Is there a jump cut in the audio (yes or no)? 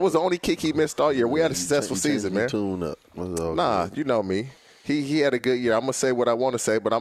no